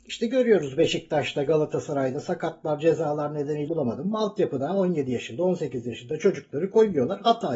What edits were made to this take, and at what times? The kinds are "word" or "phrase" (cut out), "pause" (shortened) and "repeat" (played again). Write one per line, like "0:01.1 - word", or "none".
0:03.7 - word